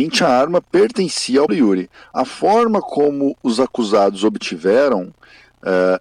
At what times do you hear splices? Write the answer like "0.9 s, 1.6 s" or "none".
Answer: 1.5 s